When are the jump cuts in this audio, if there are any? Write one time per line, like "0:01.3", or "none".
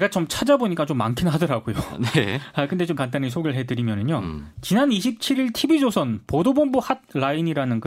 0:03.0